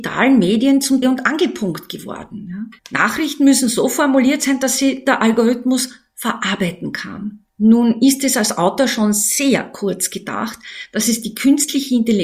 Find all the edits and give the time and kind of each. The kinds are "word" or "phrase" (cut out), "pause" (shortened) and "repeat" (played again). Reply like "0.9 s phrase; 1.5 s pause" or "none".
1.0 s word; 2.8 s pause; 7.5 s pause